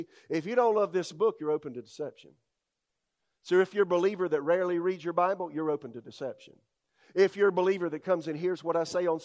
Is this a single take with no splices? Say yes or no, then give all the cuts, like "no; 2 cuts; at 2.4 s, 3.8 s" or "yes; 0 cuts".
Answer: yes; 0 cuts